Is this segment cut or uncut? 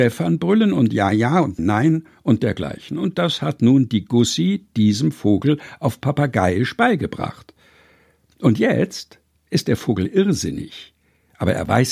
cut